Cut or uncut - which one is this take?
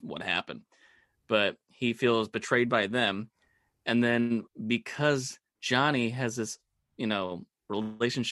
cut